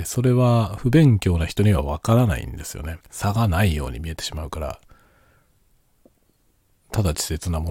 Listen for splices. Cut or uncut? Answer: cut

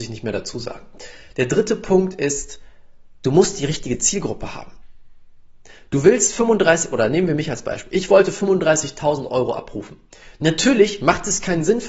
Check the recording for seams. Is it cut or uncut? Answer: uncut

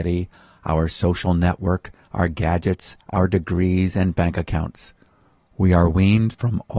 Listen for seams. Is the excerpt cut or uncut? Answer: uncut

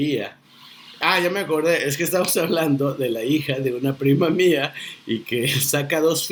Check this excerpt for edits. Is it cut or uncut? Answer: uncut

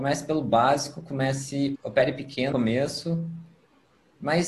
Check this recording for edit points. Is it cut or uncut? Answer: cut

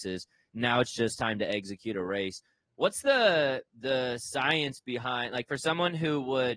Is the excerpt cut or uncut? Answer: uncut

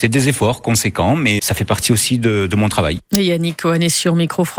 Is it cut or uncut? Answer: cut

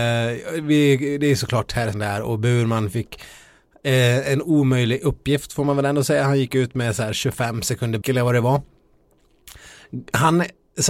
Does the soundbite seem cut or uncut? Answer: cut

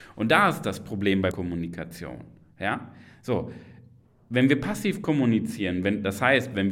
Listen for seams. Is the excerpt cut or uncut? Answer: cut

